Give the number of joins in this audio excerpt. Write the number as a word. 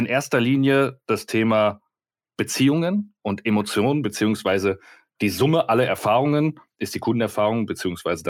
zero